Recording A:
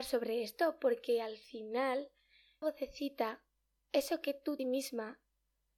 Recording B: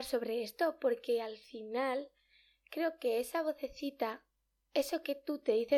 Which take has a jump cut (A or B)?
A